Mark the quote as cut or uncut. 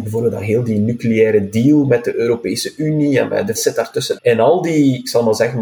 cut